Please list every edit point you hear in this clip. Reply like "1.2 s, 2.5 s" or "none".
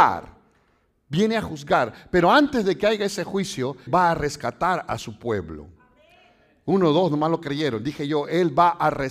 3.9 s